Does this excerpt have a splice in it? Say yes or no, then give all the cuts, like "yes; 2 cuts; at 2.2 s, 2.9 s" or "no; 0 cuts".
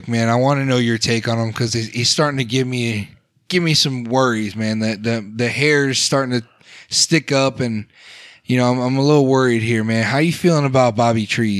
no; 0 cuts